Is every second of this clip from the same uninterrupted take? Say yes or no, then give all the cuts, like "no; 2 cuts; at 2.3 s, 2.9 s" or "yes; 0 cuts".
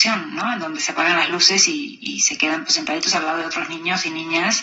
yes; 0 cuts